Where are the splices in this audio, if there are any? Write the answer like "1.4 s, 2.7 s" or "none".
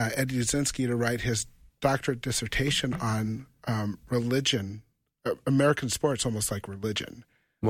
none